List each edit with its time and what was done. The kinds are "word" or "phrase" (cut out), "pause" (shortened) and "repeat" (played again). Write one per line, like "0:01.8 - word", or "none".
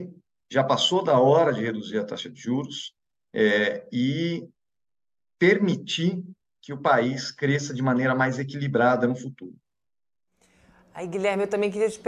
none

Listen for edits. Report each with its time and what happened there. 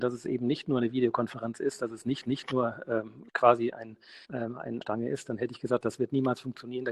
0:02.2 - repeat
0:04.2 - pause
0:04.8 - phrase

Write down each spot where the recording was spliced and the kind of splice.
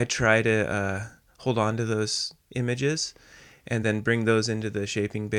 none

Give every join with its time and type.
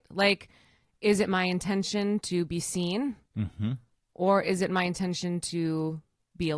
none

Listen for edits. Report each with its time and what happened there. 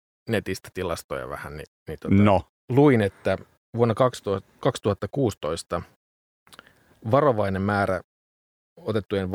none

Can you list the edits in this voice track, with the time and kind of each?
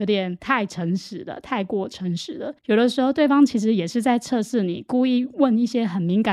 0:02.6 - pause

